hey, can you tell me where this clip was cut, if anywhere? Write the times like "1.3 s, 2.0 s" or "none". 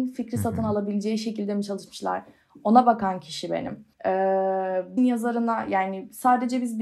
3.9 s, 5.0 s